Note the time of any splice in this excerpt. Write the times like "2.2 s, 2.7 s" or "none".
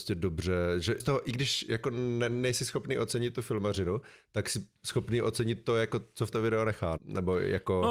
1.0 s, 6.3 s, 7.0 s